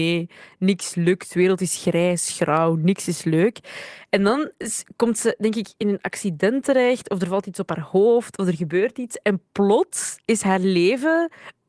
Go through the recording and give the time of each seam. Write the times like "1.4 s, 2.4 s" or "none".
none